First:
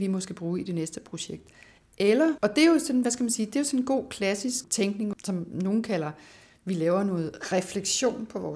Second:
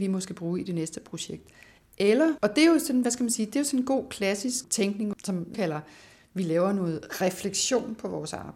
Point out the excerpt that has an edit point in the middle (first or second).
second